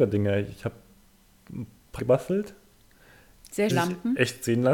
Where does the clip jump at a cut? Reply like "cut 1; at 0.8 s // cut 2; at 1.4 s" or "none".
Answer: cut 1; at 2.0 s // cut 2; at 3.7 s